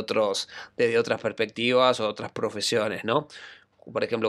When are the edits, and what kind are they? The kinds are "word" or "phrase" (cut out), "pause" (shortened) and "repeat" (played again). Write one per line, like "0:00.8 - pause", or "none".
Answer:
none